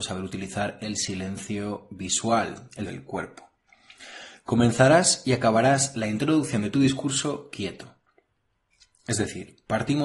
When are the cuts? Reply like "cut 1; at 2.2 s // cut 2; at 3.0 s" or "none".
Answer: cut 1; at 2.9 s